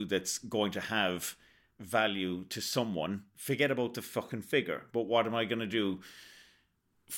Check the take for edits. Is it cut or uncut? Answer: uncut